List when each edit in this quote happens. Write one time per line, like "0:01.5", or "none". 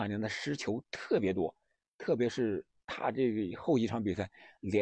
none